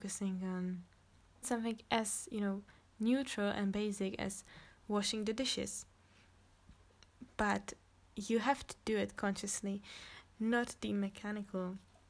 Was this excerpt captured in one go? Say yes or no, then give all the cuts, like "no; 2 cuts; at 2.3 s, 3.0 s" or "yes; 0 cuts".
no; 1 cut; at 1.4 s